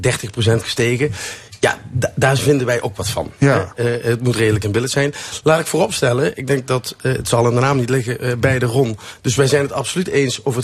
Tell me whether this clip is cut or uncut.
uncut